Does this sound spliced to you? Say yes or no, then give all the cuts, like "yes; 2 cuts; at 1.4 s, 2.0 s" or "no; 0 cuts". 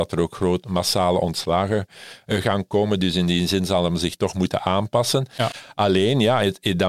no; 0 cuts